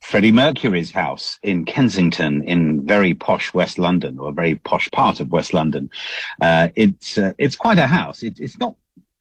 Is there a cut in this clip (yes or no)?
no